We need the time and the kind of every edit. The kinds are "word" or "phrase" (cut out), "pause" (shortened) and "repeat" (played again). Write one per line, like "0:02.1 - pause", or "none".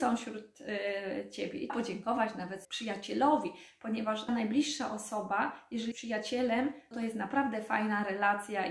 0:01.7 - word
0:02.6 - word
0:04.3 - word
0:05.9 - word
0:06.9 - word